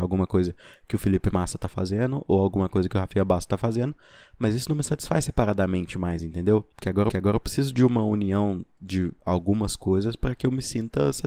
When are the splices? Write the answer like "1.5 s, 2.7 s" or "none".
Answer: 6.7 s, 7.1 s